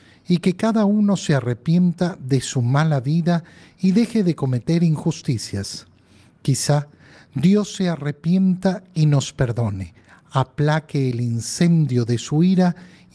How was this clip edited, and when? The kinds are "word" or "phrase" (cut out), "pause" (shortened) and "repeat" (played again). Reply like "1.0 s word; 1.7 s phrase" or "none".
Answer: none

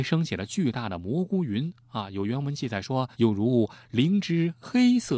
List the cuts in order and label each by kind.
3.1 s pause

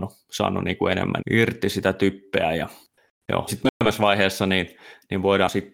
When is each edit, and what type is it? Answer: 1.2 s word; 3.5 s word

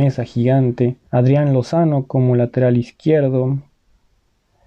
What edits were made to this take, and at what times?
1.1 s pause

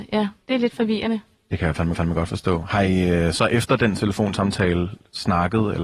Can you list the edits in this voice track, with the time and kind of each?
1.9 s repeat

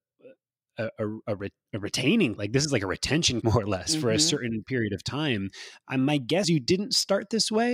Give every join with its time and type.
2.4 s word; 3.4 s word; 6.4 s word

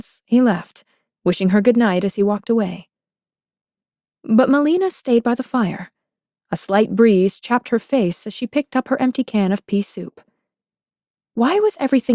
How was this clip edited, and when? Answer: none

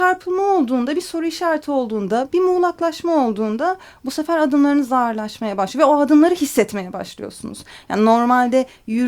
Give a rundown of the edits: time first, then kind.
none

